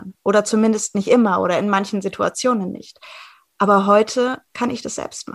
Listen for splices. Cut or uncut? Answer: uncut